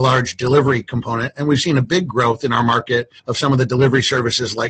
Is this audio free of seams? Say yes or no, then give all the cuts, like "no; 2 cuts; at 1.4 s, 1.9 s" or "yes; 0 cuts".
no; 1 cut; at 3.2 s